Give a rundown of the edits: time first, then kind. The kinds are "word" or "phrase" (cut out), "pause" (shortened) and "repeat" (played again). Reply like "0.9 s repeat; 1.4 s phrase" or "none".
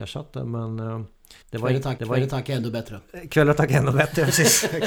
1.4 s pause; 2.0 s repeat

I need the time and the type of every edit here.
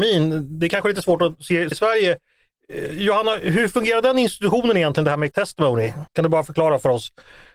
1.7 s word; 5.3 s word; 6.1 s pause

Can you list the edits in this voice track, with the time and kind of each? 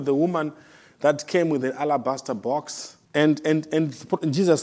3.0 s pause

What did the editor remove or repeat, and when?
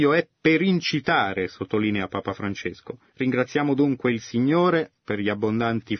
3.1 s pause; 5.0 s pause

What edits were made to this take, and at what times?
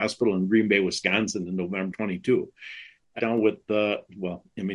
1.9 s word; 3.2 s phrase

